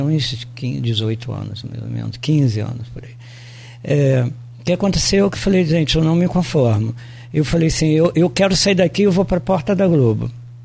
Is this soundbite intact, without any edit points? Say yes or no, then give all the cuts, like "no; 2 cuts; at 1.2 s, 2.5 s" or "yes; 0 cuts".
yes; 0 cuts